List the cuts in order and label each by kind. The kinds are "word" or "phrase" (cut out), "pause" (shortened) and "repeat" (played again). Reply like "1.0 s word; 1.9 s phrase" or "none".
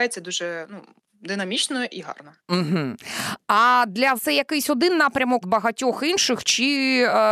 2.4 s pause; 4.2 s word; 5.4 s phrase